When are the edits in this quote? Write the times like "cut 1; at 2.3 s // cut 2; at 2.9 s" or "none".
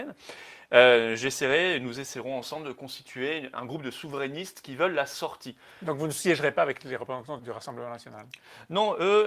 cut 1; at 3.5 s // cut 2; at 7.4 s